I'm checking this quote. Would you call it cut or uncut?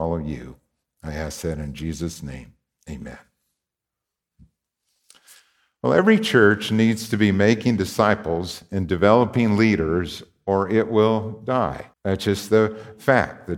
cut